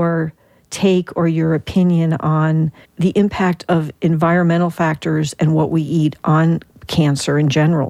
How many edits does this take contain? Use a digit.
1